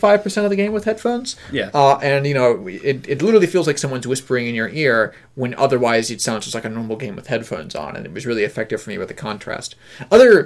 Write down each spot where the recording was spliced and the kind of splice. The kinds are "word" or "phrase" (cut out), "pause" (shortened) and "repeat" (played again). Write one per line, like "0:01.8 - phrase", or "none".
none